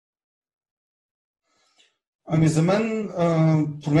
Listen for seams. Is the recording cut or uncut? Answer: uncut